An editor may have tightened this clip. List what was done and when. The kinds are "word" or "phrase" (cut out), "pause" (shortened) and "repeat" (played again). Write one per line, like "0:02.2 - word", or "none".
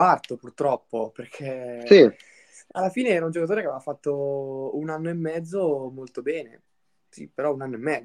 none